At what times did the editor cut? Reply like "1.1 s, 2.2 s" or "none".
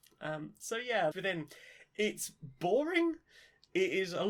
1.1 s